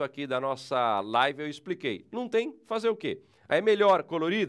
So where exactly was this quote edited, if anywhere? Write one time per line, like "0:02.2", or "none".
none

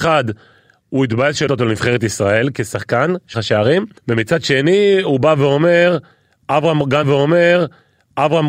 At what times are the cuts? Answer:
0:01.5
0:03.3
0:04.0
0:07.0

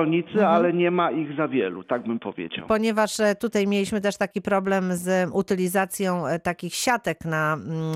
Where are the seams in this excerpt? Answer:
none

